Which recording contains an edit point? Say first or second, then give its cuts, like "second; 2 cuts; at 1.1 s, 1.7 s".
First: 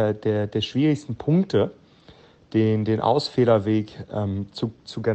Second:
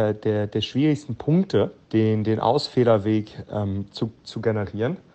second; 1 cut; at 1.8 s